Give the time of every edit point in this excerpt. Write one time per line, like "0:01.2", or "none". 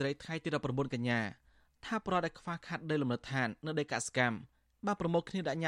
none